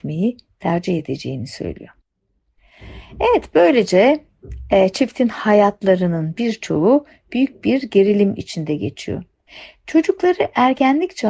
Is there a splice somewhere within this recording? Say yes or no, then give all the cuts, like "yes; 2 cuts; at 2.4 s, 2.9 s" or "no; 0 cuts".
no; 0 cuts